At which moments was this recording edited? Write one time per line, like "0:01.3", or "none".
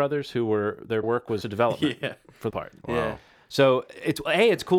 0:01.0
0:01.4
0:02.5